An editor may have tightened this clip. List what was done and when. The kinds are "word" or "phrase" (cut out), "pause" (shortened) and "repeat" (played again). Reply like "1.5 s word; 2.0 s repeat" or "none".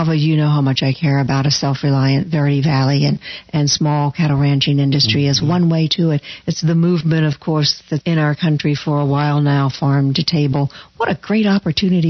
8.0 s word